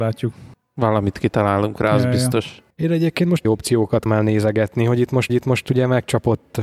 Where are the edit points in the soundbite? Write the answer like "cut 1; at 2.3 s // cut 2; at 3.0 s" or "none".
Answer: cut 1; at 2.7 s // cut 2; at 3.4 s // cut 3; at 4.1 s // cut 4; at 5.3 s